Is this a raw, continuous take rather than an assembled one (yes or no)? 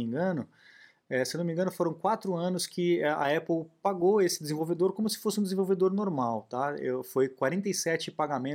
yes